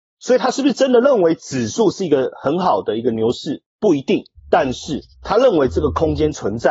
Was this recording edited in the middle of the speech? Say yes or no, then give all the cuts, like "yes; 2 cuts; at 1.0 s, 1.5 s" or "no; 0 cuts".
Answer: yes; 3 cuts; at 3.7 s, 4.4 s, 5.1 s